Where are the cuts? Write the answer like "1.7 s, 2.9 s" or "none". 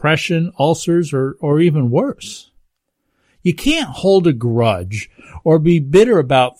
none